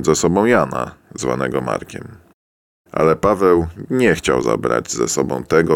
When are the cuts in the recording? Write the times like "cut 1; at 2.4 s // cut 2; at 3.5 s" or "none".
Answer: none